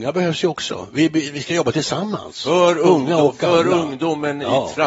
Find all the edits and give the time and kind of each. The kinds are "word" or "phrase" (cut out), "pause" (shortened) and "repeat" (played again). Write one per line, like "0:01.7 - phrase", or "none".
none

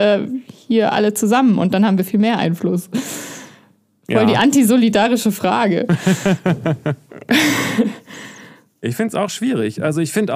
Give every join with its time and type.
none

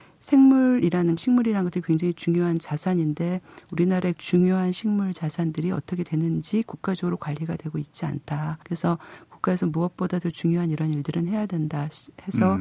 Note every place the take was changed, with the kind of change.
0:01.2 - word
0:04.1 - word
0:08.6 - pause

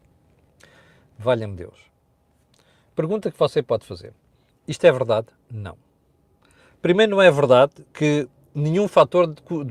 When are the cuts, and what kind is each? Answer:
none

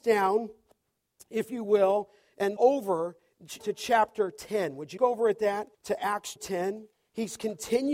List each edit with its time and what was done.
0:02.6 - word
0:03.6 - word
0:05.0 - word
0:05.7 - pause
0:06.4 - word
0:06.9 - pause

